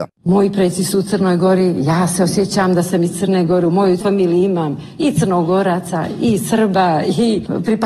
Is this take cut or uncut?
uncut